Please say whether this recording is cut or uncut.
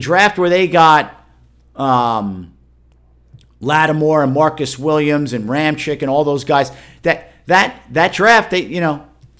uncut